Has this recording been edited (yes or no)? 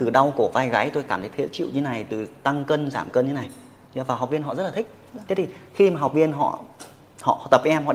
no